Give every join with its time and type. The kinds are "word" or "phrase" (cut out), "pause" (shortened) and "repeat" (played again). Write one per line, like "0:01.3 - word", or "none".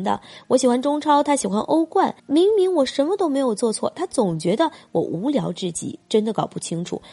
0:02.2 - pause